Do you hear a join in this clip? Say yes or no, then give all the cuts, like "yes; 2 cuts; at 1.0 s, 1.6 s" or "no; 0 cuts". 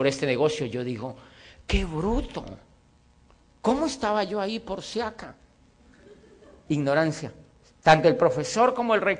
no; 0 cuts